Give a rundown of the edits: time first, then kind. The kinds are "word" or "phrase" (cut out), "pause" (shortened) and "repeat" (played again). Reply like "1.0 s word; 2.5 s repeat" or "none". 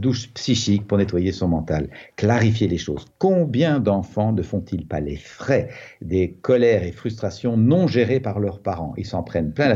none